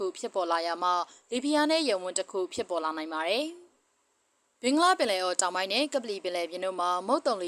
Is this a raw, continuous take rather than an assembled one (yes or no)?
yes